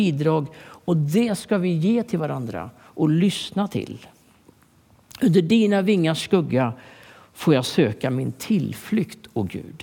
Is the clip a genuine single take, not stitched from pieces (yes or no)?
yes